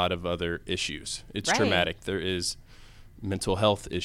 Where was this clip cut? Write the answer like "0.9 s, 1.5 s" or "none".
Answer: none

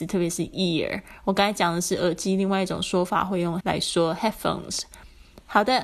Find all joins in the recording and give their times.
3.6 s

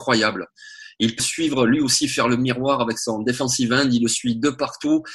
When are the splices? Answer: 1.2 s

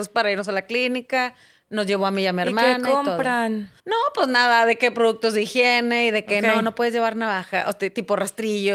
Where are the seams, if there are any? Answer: 3.8 s

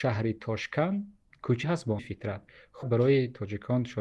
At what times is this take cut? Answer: 1.6 s, 2.0 s, 2.8 s

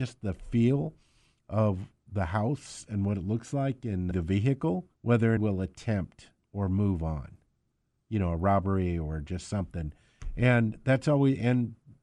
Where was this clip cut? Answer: 4.1 s, 4.9 s, 5.4 s

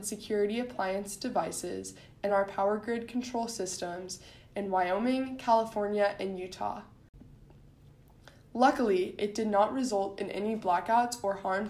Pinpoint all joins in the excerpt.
none

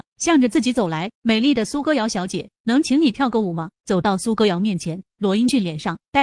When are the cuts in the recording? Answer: 1.1 s

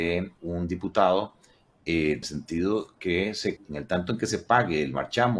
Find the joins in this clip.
2.2 s, 3.6 s

